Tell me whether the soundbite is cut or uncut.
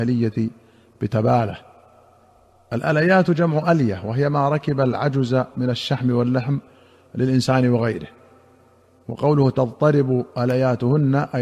uncut